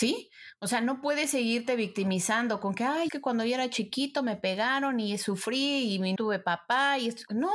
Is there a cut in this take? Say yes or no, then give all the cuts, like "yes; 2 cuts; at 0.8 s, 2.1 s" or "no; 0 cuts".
yes; 2 cuts; at 3.1 s, 6.2 s